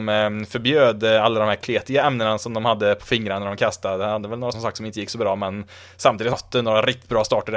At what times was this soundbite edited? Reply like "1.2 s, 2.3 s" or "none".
4.5 s, 6.3 s